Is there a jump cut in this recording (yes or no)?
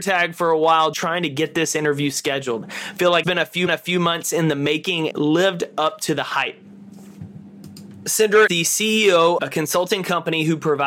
yes